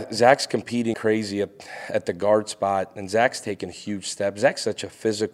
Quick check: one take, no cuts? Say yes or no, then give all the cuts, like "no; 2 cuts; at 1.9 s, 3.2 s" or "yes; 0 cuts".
no; 1 cut; at 0.9 s